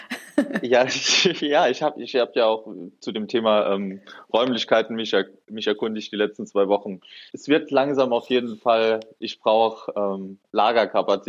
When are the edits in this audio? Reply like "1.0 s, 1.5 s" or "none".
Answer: 7.3 s